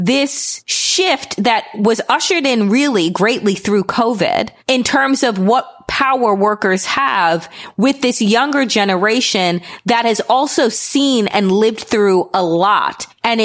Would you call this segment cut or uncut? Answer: uncut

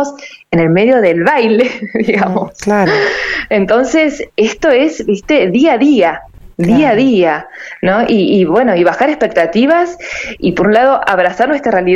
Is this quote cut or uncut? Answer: uncut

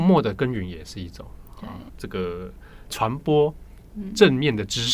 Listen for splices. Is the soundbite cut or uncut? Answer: cut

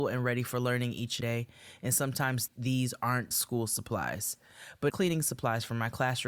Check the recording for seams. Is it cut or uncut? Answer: cut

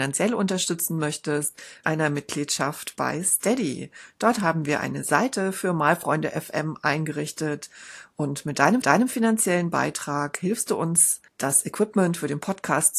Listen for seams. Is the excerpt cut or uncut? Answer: cut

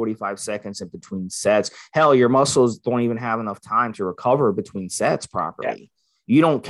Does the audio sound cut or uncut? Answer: uncut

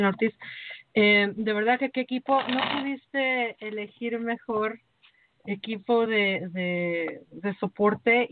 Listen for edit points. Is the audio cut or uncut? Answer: uncut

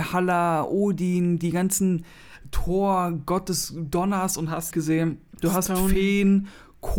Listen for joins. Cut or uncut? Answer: cut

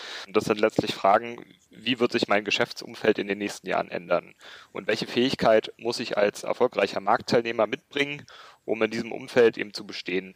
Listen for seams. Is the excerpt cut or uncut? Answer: uncut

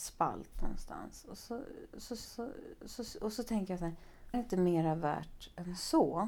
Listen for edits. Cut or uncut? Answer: cut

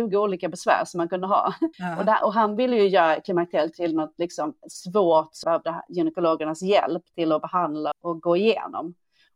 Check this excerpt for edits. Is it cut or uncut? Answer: cut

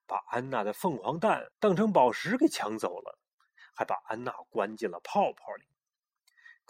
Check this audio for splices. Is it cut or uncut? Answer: cut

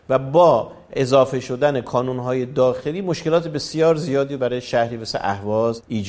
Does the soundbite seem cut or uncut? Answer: uncut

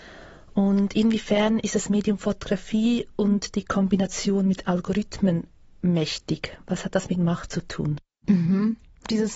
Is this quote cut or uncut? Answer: uncut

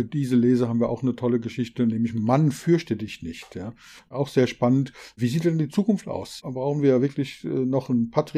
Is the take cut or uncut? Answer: uncut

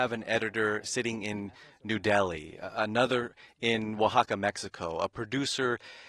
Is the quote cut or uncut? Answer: uncut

